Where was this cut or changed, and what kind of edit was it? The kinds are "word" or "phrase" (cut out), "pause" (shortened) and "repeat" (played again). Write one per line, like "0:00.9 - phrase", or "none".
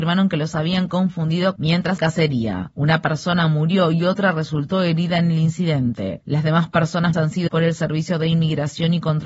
0:01.6 - phrase
0:02.0 - phrase
0:07.1 - word
0:07.5 - word